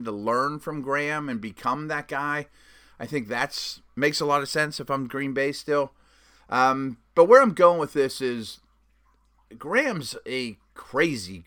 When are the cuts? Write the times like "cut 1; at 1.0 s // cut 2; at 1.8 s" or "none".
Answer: none

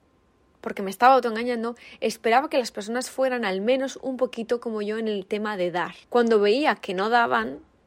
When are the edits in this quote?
cut 1; at 6.0 s

